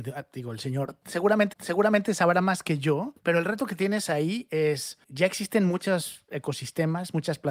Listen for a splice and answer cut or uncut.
cut